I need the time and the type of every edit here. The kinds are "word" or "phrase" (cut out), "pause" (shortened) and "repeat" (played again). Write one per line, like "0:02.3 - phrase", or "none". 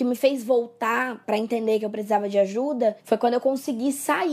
0:03.0 - pause